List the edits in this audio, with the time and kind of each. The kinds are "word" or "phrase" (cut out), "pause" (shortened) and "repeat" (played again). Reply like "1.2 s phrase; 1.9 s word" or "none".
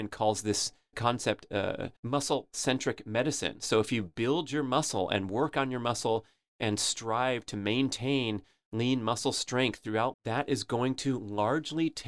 0.9 s word; 2.0 s pause; 10.1 s word